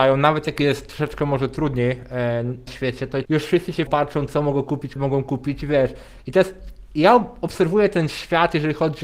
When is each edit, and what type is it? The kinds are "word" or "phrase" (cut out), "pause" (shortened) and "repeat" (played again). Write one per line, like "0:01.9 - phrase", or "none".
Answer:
0:02.7 - word
0:03.2 - word
0:03.9 - word
0:05.0 - word